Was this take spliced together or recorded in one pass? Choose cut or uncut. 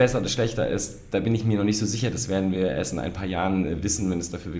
uncut